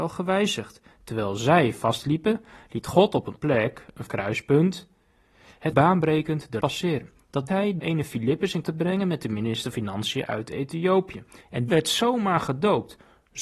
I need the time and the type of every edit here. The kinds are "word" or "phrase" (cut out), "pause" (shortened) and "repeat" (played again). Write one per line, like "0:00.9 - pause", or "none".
0:03.3 - word
0:04.1 - word
0:05.7 - word
0:06.6 - word
0:07.5 - word
0:07.8 - word
0:08.6 - word
0:09.7 - word
0:11.7 - word